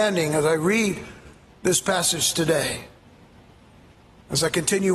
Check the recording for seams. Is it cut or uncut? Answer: uncut